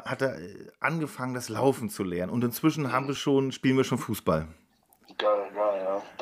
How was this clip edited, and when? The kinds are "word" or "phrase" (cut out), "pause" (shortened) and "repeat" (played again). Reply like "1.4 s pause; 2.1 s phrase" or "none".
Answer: none